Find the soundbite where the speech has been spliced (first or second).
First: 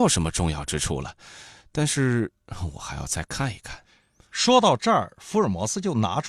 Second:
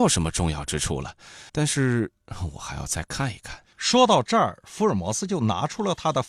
second